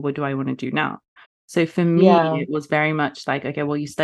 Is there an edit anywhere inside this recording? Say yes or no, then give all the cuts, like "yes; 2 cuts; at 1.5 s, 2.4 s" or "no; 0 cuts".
yes; 1 cut; at 1.2 s